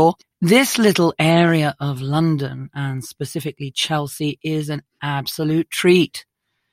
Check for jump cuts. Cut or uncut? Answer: uncut